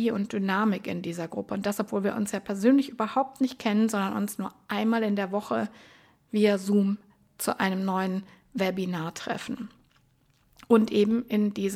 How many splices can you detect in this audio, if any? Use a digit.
0